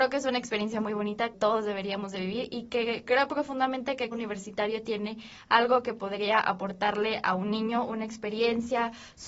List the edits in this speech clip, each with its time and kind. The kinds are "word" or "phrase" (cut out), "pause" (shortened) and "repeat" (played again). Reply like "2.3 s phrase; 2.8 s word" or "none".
1.3 s word; 4.1 s word